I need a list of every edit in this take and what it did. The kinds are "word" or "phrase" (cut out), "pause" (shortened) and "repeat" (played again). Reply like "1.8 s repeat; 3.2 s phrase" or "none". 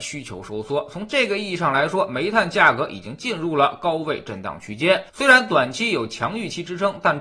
5.1 s pause